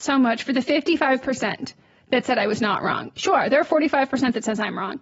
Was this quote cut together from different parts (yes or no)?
no